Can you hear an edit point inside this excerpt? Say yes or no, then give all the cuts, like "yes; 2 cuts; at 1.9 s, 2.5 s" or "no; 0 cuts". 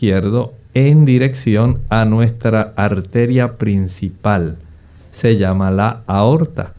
no; 0 cuts